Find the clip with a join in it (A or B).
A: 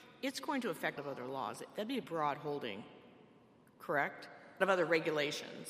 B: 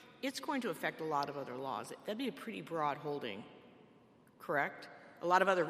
A